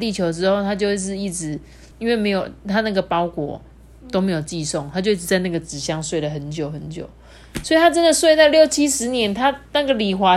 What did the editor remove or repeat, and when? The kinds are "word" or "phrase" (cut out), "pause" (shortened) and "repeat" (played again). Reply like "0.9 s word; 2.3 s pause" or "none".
1.9 s pause